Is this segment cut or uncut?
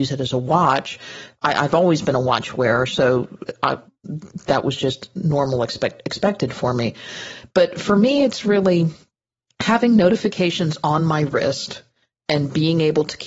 uncut